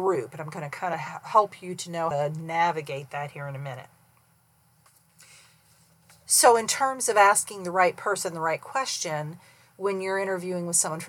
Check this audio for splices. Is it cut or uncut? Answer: cut